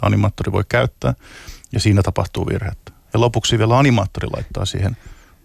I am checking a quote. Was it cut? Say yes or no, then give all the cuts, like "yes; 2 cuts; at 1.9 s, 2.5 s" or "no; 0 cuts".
no; 0 cuts